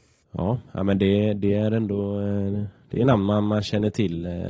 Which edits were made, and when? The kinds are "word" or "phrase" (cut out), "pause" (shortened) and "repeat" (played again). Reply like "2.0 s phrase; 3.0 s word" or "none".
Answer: none